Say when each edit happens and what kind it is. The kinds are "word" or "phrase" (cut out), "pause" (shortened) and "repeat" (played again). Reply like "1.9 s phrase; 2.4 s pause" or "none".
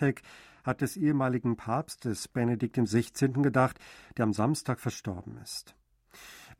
none